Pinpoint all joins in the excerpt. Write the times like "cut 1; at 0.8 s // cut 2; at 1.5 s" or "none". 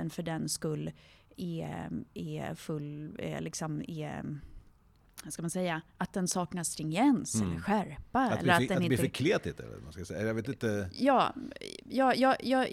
none